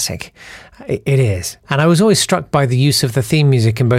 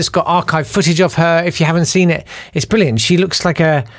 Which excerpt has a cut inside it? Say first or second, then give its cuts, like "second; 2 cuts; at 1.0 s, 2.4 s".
first; 1 cut; at 1.6 s